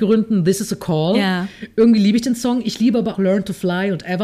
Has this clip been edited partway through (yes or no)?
yes